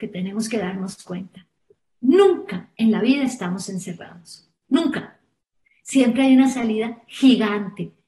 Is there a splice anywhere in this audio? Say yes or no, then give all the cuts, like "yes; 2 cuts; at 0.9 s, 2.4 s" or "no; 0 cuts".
no; 0 cuts